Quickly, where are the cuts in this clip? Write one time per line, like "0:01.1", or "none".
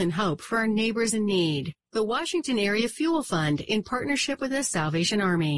none